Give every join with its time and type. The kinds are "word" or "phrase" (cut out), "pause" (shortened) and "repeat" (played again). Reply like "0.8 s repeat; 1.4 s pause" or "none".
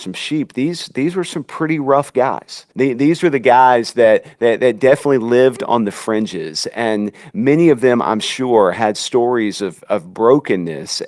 2.7 s pause